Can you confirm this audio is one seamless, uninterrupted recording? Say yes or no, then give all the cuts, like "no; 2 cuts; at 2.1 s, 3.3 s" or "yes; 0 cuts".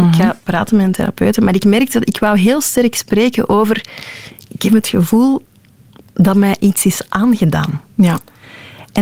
yes; 0 cuts